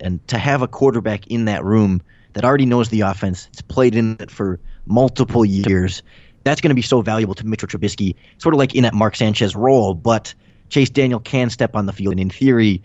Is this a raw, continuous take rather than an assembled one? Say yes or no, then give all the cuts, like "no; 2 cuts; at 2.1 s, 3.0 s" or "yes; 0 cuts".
yes; 0 cuts